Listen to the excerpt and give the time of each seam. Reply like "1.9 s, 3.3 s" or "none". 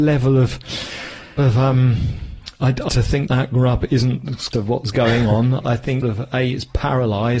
1.4 s, 2.9 s, 3.3 s, 4.5 s, 5.6 s, 6.0 s